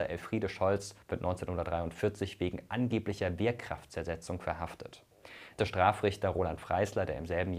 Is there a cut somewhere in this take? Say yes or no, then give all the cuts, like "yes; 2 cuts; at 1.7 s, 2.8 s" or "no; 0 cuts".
yes; 2 cuts; at 1.0 s, 5.6 s